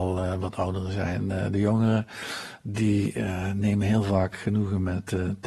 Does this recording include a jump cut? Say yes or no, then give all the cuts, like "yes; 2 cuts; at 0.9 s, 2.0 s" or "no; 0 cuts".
no; 0 cuts